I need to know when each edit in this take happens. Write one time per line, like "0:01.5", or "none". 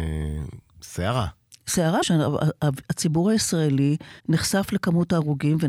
0:02.0
0:04.2